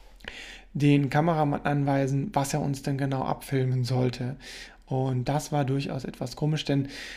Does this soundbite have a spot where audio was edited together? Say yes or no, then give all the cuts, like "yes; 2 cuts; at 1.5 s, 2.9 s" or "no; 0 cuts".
yes; 1 cut; at 5.2 s